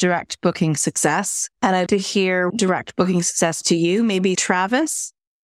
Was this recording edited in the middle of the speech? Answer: yes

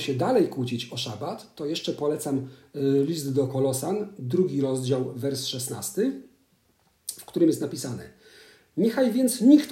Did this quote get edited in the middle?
no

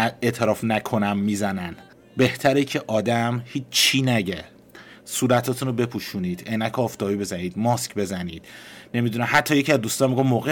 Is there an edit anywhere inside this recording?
yes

